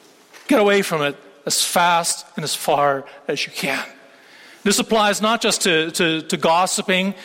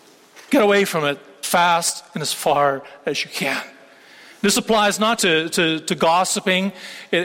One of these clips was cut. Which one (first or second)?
second